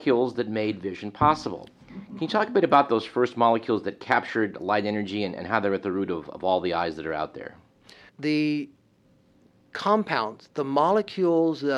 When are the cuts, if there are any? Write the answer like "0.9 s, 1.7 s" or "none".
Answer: none